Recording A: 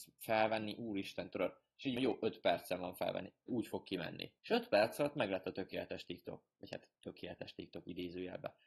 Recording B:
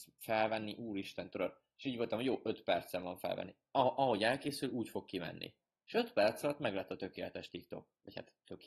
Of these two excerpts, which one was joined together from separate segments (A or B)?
A